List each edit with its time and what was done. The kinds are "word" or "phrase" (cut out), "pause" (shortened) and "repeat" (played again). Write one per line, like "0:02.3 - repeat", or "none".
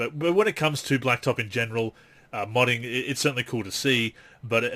none